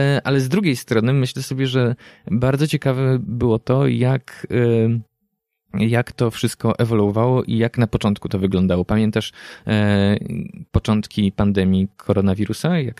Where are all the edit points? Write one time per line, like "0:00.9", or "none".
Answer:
none